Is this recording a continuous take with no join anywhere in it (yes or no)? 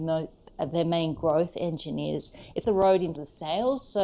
no